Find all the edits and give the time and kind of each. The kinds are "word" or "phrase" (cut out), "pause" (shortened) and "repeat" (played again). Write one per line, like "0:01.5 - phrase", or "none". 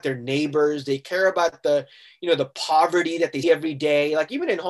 0:03.4 - word